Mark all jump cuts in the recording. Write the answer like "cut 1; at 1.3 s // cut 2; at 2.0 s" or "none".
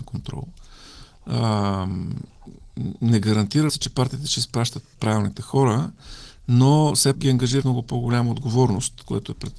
cut 1; at 3.7 s // cut 2; at 4.9 s // cut 3; at 7.1 s // cut 4; at 7.6 s